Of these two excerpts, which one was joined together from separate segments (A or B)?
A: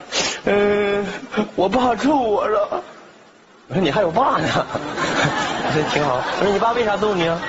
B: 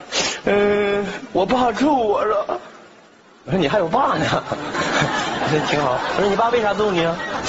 B